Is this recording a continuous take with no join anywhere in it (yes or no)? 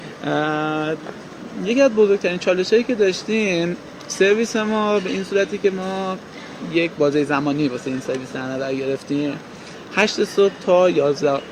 yes